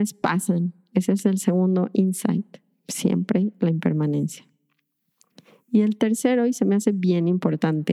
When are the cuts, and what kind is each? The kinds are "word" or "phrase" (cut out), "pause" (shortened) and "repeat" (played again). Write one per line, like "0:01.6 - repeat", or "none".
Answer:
none